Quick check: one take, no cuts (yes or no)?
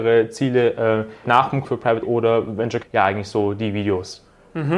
no